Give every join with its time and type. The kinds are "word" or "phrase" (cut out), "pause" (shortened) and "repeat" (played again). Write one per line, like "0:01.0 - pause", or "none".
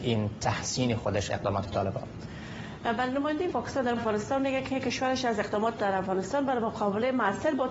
0:01.3 - word
0:03.5 - word
0:04.0 - word
0:05.8 - word